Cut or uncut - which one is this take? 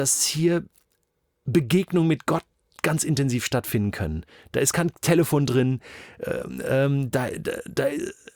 uncut